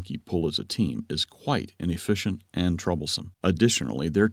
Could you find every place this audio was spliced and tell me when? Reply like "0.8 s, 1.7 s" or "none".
3.3 s